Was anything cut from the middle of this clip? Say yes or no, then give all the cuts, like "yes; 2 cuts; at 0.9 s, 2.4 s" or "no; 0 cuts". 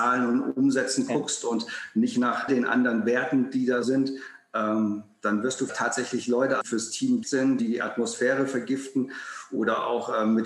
yes; 6 cuts; at 2.5 s, 3.8 s, 5.7 s, 6.6 s, 7.2 s, 7.6 s